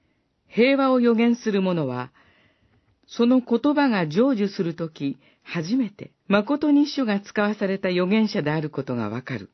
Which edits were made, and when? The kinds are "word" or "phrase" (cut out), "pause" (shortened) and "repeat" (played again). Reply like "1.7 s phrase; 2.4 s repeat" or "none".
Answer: 6.2 s pause